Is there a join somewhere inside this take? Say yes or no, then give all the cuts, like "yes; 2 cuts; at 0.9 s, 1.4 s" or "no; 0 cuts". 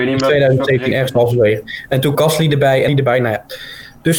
yes; 2 cuts; at 2.1 s, 2.9 s